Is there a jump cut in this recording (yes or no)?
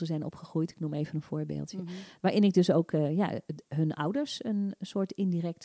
no